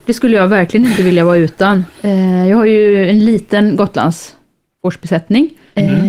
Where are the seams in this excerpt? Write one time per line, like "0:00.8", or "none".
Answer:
none

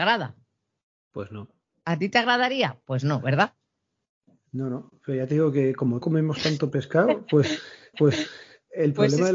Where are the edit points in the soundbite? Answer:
0:06.0
0:07.9

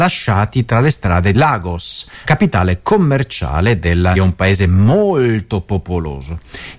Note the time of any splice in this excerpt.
0:01.3
0:02.3
0:04.2

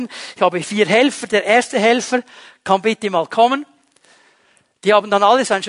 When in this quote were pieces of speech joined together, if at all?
none

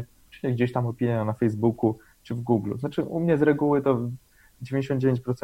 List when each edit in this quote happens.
none

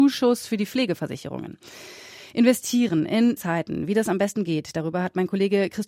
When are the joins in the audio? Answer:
0:03.4

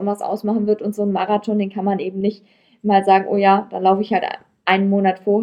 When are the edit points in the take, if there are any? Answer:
none

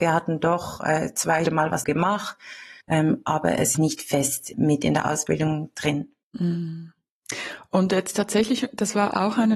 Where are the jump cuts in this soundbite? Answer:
0:01.5
0:01.8
0:02.8
0:03.7
0:04.5
0:06.2

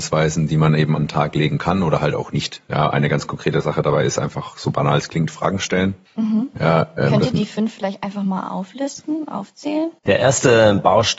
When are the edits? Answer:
0:10.0

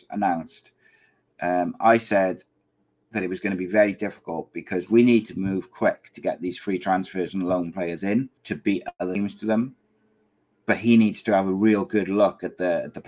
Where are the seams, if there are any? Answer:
0:02.9
0:08.4
0:10.2

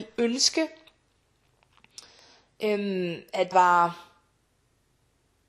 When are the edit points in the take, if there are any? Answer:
0:03.5

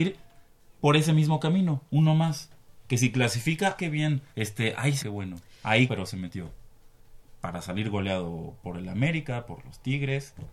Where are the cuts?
0:03.8
0:04.3
0:05.0
0:05.9

